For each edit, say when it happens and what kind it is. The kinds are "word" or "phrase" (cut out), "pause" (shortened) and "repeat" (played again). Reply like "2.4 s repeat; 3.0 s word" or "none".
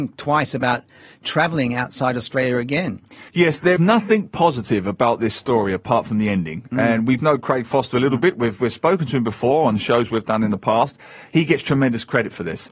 3.3 s pause; 3.8 s word; 7.2 s word